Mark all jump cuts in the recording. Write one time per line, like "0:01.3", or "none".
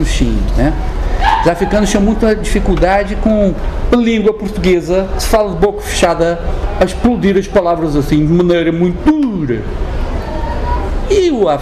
none